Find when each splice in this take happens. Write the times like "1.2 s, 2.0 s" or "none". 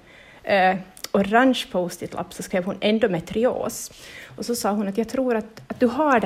none